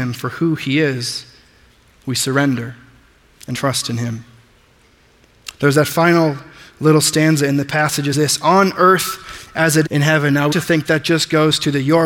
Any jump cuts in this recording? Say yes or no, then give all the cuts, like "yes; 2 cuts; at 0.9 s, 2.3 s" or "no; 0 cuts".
yes; 5 cuts; at 1.7 s, 3.5 s, 8.1 s, 9.8 s, 10.5 s